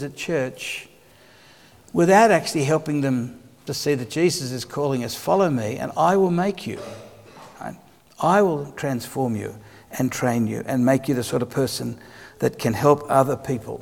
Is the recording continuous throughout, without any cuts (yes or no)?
yes